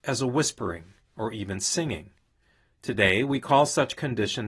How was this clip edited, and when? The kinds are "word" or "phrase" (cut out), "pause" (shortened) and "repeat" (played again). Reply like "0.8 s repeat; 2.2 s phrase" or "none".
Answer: none